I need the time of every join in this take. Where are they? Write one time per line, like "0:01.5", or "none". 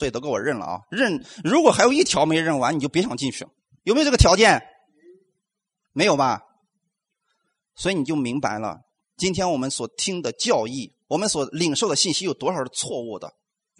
none